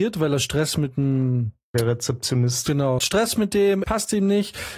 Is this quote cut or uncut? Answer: cut